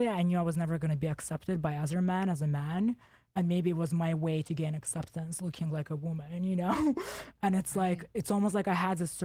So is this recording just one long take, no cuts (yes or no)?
yes